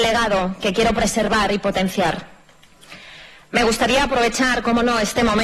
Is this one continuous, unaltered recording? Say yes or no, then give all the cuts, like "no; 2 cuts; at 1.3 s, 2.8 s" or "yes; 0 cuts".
yes; 0 cuts